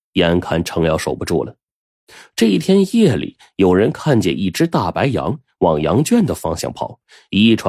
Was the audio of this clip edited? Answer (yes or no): no